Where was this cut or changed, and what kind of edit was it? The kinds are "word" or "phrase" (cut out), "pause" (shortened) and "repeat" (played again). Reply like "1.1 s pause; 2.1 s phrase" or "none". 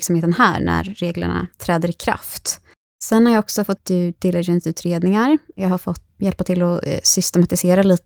1.5 s pause; 3.8 s phrase; 6.2 s word